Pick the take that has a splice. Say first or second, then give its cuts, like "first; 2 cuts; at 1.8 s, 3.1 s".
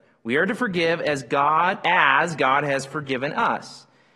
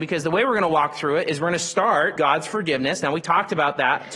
second; 1 cut; at 2.1 s